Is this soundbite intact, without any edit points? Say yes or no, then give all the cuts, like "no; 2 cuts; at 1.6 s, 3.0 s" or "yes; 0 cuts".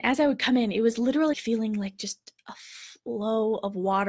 no; 1 cut; at 1.3 s